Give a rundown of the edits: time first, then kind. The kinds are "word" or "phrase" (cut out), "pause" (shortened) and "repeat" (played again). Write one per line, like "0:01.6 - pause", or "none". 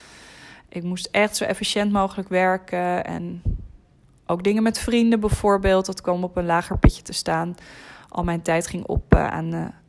none